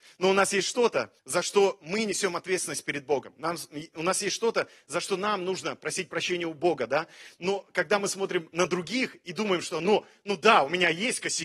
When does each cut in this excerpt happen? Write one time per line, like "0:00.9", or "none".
0:01.2